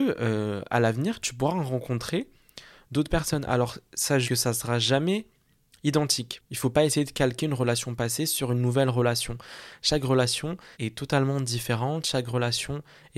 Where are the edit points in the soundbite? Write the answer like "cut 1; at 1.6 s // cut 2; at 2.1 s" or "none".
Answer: cut 1; at 4.2 s // cut 2; at 6.5 s // cut 3; at 10.7 s